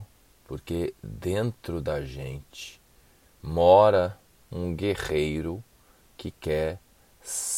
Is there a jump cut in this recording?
no; 0 cuts

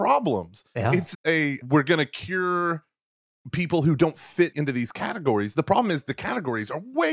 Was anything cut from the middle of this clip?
yes; 2 cuts; at 1.1 s, 4.5 s

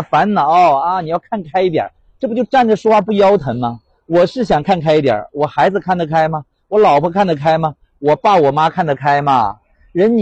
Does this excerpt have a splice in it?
no; 0 cuts

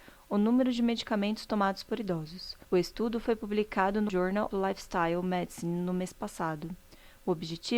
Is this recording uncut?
no; 3 cuts; at 2.6 s, 4.1 s, 4.5 s

